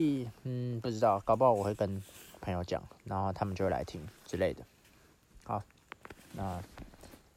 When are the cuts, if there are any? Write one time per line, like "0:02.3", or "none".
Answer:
0:03.0
0:04.2